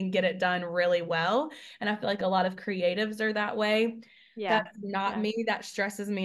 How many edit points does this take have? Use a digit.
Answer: 0